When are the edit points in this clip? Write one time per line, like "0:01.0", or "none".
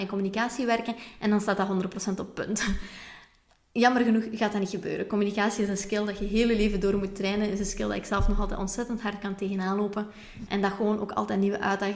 none